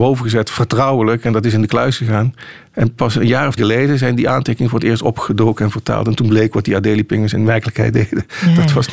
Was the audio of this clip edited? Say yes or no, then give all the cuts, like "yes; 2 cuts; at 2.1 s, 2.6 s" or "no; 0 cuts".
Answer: yes; 1 cut; at 3.6 s